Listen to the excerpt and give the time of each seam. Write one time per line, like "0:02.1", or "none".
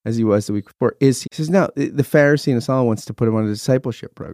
0:01.2